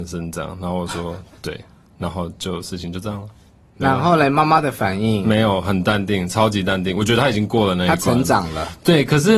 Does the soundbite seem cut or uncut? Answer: uncut